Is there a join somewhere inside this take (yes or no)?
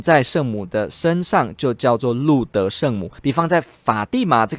yes